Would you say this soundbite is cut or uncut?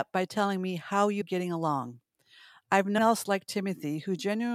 cut